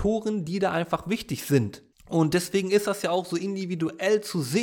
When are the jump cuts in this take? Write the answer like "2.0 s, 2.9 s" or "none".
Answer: 1.9 s